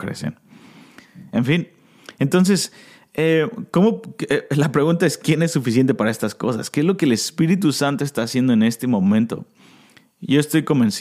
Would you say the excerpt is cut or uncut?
uncut